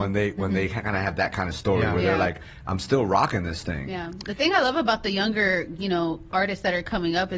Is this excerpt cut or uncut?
uncut